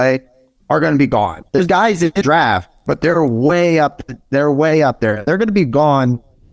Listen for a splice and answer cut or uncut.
cut